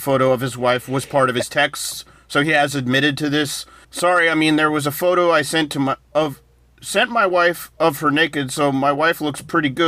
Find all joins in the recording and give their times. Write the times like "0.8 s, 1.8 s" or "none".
3.8 s